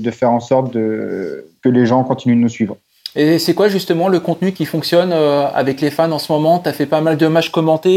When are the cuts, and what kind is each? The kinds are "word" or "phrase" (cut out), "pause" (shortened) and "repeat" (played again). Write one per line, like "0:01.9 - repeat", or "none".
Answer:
none